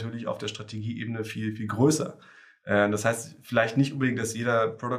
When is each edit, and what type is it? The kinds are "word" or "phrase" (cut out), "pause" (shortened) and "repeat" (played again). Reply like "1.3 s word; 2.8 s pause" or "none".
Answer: none